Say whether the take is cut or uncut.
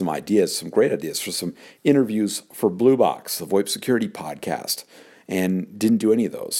uncut